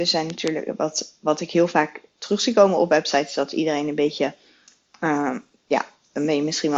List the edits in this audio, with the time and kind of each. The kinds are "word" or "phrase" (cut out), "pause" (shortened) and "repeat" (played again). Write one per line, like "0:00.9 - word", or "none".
none